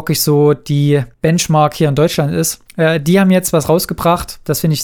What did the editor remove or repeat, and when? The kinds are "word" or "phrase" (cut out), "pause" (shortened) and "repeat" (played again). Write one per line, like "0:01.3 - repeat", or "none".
0:01.1 - pause
0:02.7 - pause